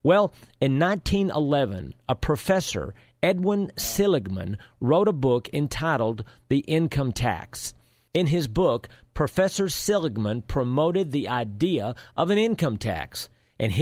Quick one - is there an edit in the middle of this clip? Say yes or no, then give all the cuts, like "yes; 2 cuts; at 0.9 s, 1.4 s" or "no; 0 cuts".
no; 0 cuts